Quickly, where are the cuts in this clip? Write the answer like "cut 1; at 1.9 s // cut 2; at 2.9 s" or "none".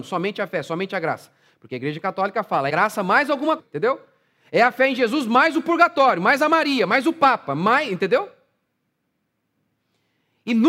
cut 1; at 2.7 s // cut 2; at 3.6 s